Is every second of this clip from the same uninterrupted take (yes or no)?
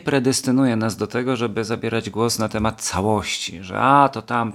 yes